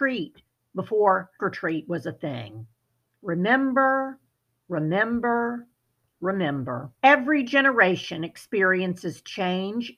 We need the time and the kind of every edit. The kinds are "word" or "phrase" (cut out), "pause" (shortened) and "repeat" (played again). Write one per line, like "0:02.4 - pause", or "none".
0:01.4 - word
0:06.9 - pause